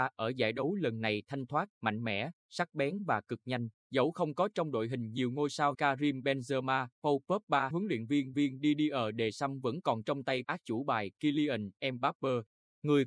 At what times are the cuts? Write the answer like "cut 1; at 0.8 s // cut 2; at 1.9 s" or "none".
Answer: cut 1; at 1.7 s // cut 2; at 2.4 s // cut 3; at 3.7 s // cut 4; at 5.7 s // cut 5; at 6.9 s // cut 6; at 7.7 s // cut 7; at 8.3 s // cut 8; at 10.4 s